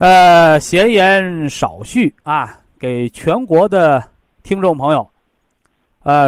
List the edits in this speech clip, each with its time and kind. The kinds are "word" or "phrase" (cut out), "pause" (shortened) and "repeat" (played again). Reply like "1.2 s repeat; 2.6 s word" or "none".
none